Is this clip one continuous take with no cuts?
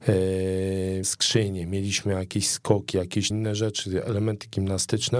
no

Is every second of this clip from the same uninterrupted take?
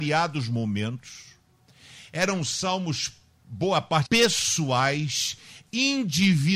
no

